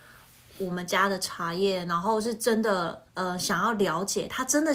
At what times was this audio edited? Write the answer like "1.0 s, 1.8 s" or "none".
3.1 s